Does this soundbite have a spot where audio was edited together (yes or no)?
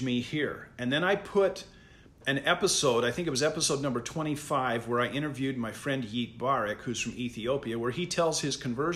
no